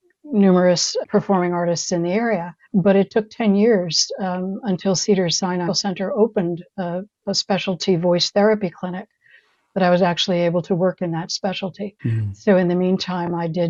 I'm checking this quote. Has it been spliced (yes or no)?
yes